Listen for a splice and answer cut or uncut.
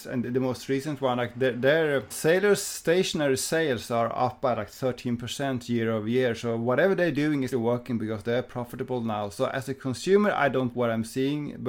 cut